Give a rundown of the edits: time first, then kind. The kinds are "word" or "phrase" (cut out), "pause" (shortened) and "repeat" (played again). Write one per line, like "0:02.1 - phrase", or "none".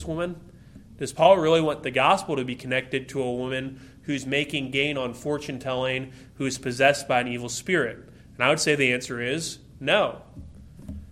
none

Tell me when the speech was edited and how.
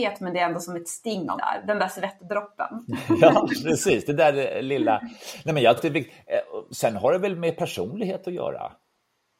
0:01.4 - word
0:05.8 - word

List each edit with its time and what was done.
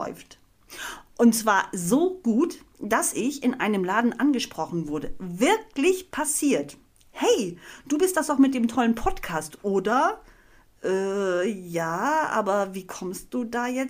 none

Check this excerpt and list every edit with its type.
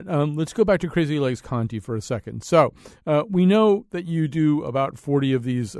none

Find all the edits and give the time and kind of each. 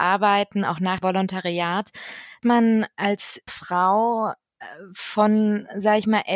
0:01.0 - word
0:02.4 - word
0:03.5 - word

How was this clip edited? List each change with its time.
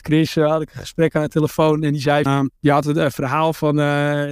0:02.3 - word
0:02.6 - pause

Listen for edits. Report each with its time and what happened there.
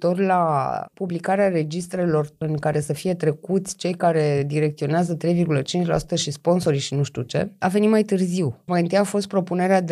none

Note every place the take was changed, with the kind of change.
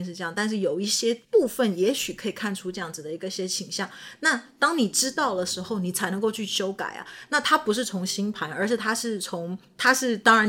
0:01.2 - pause

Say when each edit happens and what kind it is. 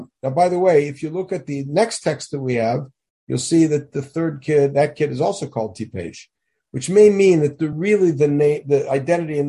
none

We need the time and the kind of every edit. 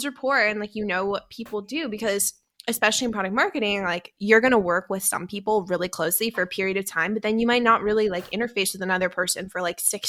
none

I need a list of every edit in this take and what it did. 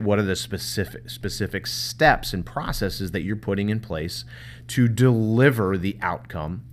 none

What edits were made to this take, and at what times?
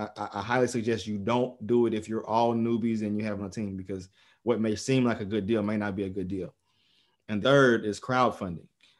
0:03.4 - word
0:07.4 - word

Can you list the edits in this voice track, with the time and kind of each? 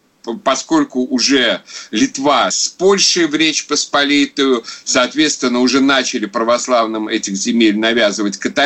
0:02.5 - word

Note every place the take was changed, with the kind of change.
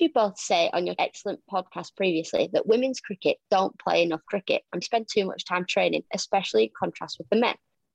0:01.0 - word
0:04.8 - word

